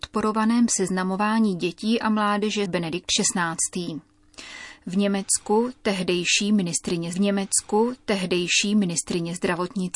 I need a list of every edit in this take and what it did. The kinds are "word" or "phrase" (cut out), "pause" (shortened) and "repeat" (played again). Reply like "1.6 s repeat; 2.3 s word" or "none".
2.7 s phrase; 7.1 s repeat